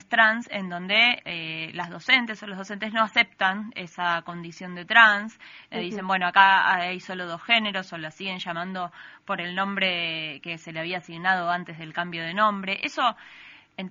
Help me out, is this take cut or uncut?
uncut